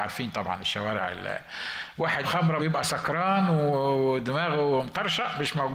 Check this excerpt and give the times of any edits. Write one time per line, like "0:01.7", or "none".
0:02.2
0:02.6